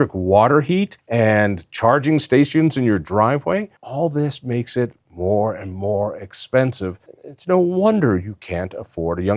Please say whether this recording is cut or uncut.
cut